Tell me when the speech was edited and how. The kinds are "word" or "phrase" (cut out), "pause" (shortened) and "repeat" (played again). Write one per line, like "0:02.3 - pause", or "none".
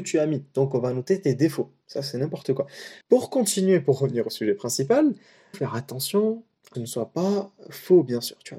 0:03.0 - pause
0:05.5 - phrase
0:06.7 - phrase